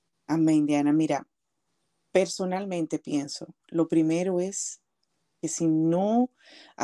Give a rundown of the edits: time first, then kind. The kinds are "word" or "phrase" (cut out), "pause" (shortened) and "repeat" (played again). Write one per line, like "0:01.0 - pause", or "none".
none